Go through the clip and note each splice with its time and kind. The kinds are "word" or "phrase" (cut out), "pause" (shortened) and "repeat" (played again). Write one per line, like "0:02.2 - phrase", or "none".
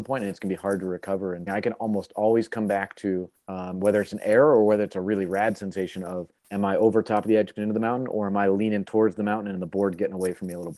0:01.5 - phrase
0:03.3 - pause
0:06.4 - pause
0:07.6 - word